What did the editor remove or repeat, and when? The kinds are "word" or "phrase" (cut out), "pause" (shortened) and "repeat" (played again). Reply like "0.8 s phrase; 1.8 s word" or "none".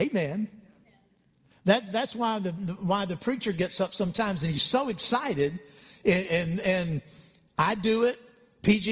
none